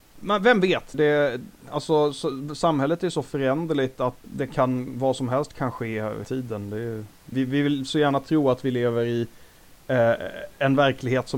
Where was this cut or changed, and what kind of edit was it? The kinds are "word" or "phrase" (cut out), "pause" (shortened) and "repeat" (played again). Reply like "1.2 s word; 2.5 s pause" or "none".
0.9 s word; 4.2 s word; 6.2 s word; 7.3 s word